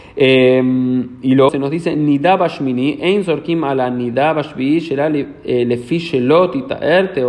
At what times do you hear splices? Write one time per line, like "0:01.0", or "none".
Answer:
0:01.5